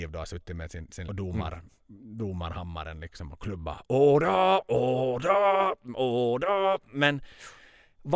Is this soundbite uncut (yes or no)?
no